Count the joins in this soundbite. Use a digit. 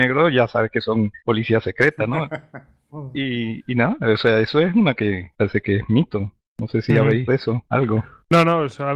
3